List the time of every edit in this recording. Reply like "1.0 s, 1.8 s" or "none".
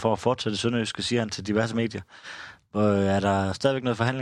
none